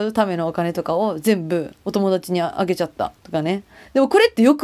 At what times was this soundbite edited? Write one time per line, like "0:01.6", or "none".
0:01.8
0:03.2